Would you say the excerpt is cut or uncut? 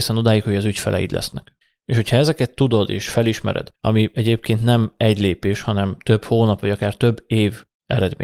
cut